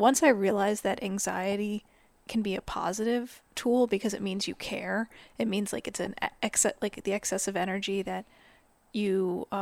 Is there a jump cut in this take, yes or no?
no